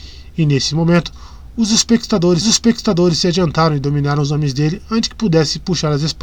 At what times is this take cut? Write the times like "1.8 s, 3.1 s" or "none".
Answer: 2.4 s

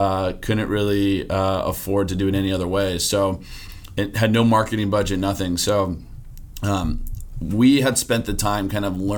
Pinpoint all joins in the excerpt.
none

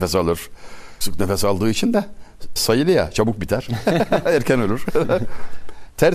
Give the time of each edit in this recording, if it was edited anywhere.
1.0 s, 2.6 s

